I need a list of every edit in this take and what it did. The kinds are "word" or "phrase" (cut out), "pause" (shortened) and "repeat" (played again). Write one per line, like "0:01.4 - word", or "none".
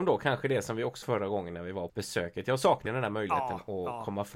0:01.0 - word
0:01.9 - word
0:02.9 - word